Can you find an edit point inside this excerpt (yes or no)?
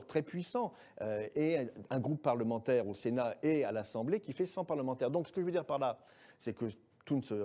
no